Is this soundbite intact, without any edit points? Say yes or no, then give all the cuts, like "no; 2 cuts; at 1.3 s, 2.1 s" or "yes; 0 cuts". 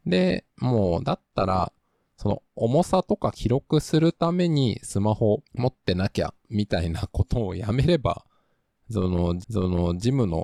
no; 3 cuts; at 2.5 s, 5.5 s, 9.4 s